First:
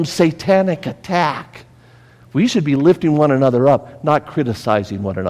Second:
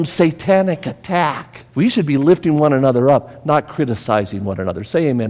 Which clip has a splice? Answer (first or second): second